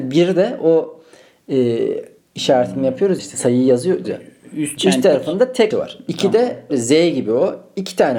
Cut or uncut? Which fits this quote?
cut